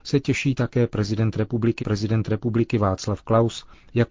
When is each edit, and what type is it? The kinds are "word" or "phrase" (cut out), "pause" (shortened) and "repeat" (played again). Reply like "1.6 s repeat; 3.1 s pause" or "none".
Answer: 1.8 s repeat